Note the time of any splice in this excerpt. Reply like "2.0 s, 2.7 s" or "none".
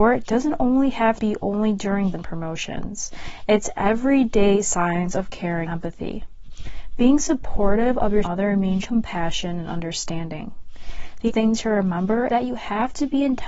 1.2 s, 2.1 s, 5.7 s, 8.2 s, 8.8 s, 11.3 s, 12.3 s

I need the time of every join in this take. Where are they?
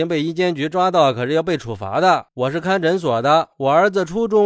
2.3 s

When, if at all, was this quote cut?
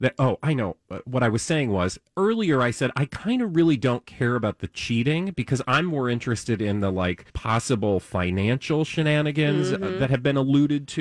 7.3 s

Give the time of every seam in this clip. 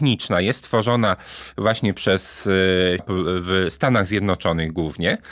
3.0 s

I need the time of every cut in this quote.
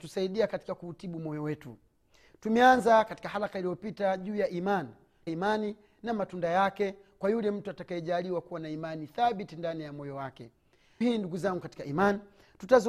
5.3 s, 11.0 s

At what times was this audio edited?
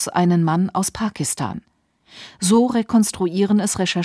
none

